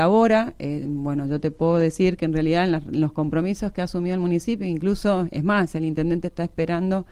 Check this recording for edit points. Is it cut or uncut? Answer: uncut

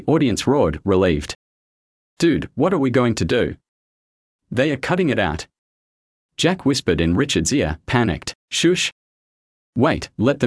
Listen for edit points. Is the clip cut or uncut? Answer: cut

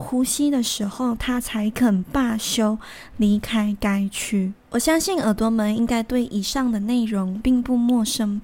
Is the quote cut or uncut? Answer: cut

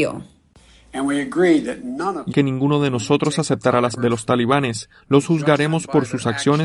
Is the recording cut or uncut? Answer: cut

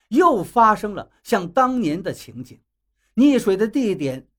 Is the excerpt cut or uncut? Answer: uncut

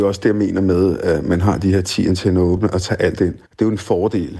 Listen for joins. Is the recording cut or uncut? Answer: cut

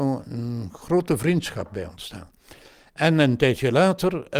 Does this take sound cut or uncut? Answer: uncut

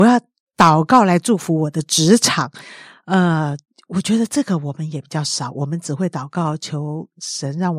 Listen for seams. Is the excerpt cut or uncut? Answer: uncut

